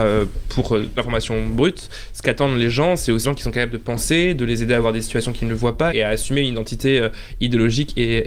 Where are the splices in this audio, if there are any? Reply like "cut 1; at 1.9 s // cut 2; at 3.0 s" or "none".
cut 1; at 1.0 s // cut 2; at 3.2 s // cut 3; at 5.9 s